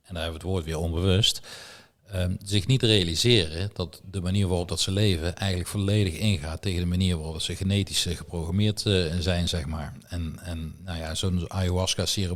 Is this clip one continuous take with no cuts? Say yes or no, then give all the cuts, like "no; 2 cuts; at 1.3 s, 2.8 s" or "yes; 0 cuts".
yes; 0 cuts